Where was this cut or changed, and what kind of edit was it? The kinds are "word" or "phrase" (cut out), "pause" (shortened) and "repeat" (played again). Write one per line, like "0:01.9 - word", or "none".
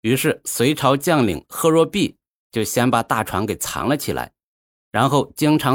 none